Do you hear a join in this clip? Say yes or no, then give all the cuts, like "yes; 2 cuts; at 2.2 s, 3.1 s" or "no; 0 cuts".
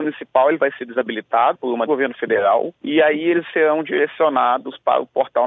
yes; 2 cuts; at 1.5 s, 1.9 s